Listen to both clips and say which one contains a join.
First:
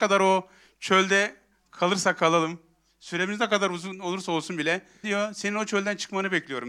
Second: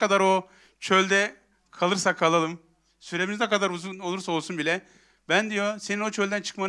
first; 1 cut; at 5.0 s

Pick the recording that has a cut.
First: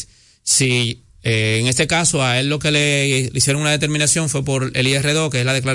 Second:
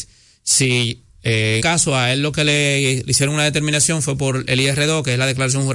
second; 1 cut; at 1.6 s

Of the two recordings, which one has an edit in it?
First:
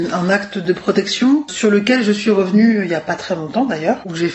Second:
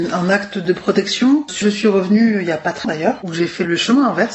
second; 2 cuts; at 1.6 s, 2.8 s

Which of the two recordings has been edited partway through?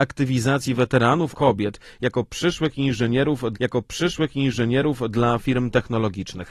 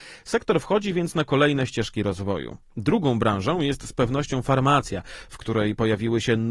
first; 2 cuts; at 1.3 s, 3.5 s

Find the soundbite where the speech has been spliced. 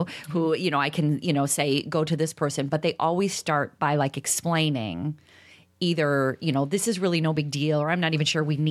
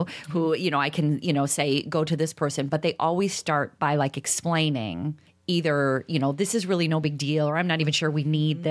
second; 1 cut; at 5.3 s

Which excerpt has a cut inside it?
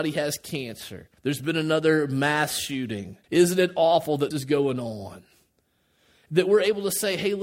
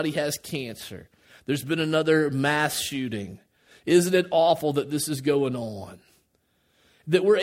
first; 3 cuts; at 1.2 s, 3.2 s, 4.3 s

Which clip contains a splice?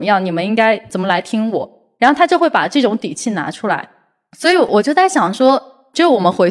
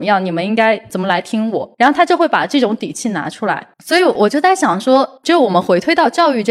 second; 3 cuts; at 1.7 s, 3.7 s, 5.2 s

